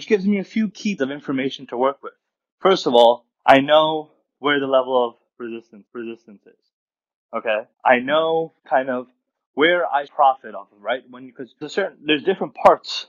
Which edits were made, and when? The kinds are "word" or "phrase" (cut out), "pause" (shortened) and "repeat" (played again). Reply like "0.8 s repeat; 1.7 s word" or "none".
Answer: 1.0 s word; 2.4 s pause; 3.3 s pause; 5.9 s repeat; 7.7 s pause; 8.6 s pause; 10.1 s word; 11.6 s word